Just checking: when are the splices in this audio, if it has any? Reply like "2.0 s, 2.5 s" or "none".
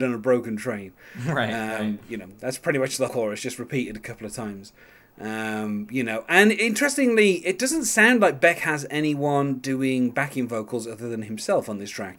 3.1 s